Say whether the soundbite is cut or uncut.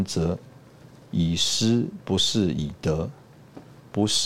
uncut